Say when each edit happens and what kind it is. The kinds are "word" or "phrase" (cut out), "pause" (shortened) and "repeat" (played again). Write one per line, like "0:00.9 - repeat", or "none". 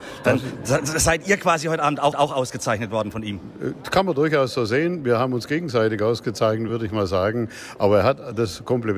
0:02.1 - repeat
0:06.7 - word